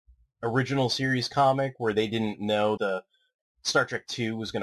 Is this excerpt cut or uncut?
cut